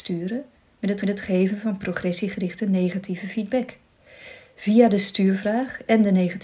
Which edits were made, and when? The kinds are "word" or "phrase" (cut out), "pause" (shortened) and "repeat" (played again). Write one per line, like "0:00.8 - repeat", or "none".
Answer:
0:01.0 - repeat